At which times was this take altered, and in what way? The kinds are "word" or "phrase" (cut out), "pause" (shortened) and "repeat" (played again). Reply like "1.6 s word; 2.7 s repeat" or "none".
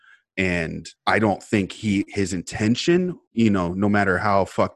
1.0 s pause; 3.3 s pause

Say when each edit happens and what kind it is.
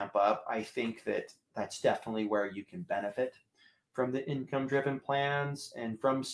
none

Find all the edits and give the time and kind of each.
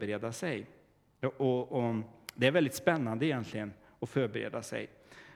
none

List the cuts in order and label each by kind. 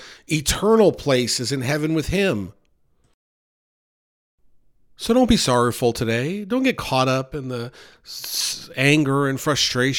none

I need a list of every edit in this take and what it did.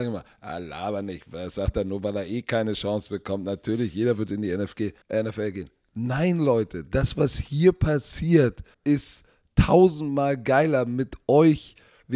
5.0 s pause; 8.7 s pause

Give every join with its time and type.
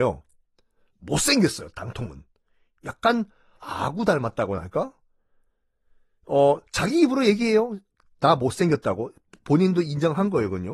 3.6 s word

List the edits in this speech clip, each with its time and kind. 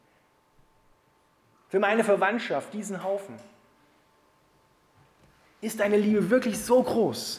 none

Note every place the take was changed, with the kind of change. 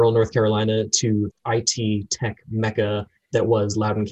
1.3 s word

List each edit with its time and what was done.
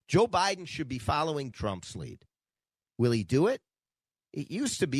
1.5 s word

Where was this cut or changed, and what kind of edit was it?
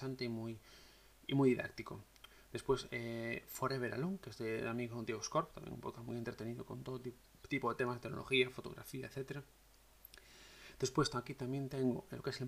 none

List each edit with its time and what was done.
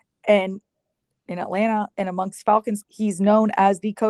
1.9 s pause; 2.8 s word

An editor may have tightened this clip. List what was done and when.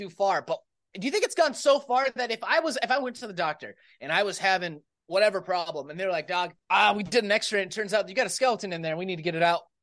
none

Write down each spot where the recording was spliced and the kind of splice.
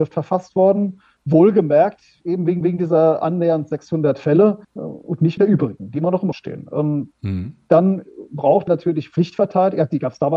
2.6 s repeat; 4.6 s pause; 5.4 s word; 6.3 s word; 8.7 s word

